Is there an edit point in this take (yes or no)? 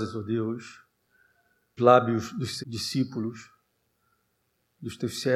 yes